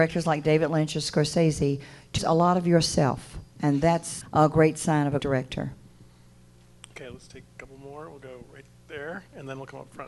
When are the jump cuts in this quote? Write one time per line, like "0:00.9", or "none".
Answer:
0:02.2
0:03.5
0:04.2
0:05.2

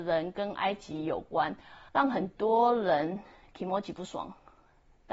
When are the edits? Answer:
0:01.9

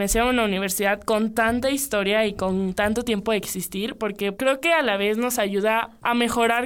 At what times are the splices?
none

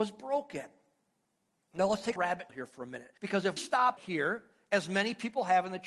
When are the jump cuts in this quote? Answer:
0:02.2
0:02.5
0:03.2
0:03.6
0:04.0

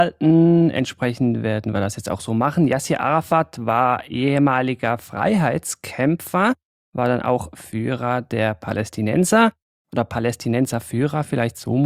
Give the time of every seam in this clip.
none

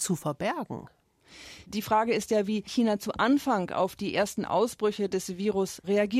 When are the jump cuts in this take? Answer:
none

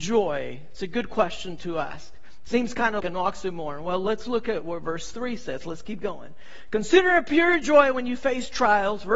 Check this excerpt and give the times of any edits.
0:03.0

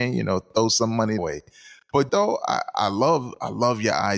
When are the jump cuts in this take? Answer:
0:01.2
0:02.1

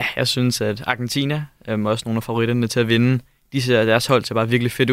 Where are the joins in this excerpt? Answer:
none

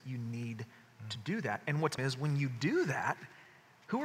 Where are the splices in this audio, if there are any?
0:02.0

